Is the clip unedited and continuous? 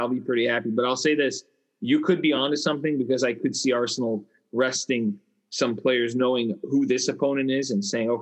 yes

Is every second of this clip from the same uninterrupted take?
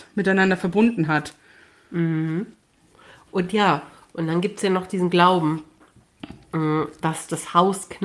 yes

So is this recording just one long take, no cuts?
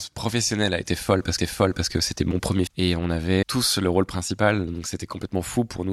no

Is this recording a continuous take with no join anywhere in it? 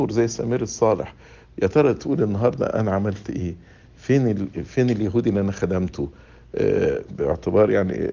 yes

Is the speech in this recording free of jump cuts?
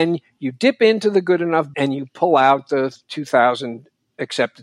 no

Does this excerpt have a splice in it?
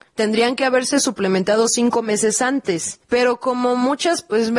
no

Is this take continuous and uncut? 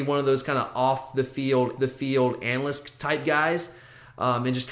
no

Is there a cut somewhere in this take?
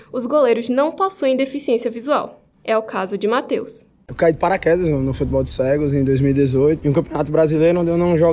no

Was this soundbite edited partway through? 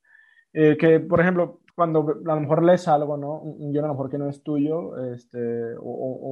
yes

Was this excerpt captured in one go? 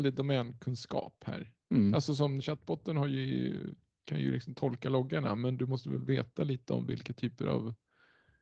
yes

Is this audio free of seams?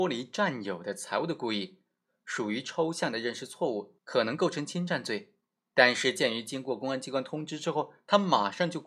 no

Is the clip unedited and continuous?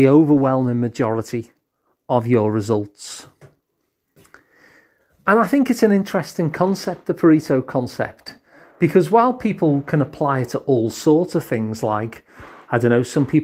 yes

